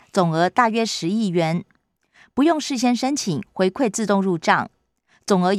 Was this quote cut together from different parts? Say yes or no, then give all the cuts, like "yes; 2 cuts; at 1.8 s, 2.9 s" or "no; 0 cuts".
no; 0 cuts